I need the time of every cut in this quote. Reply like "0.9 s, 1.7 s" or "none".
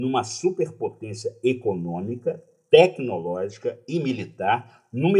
none